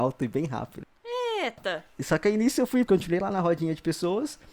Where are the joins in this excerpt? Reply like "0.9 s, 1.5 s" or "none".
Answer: 2.9 s

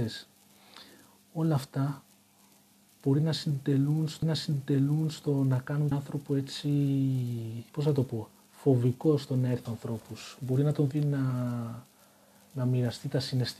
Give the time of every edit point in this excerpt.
4.2 s, 5.9 s, 7.7 s, 9.7 s, 10.9 s

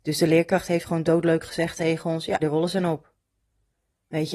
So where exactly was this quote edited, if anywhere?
1.0 s, 2.4 s

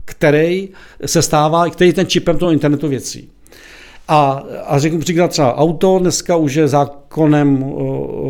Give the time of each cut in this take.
none

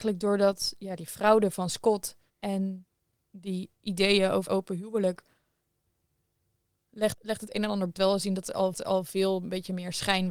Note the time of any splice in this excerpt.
2.3 s, 4.5 s, 7.1 s, 8.0 s, 8.7 s

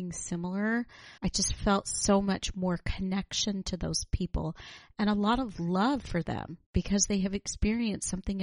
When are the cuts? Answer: 1.2 s, 6.7 s

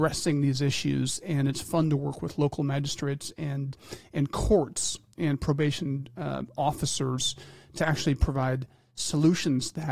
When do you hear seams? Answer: none

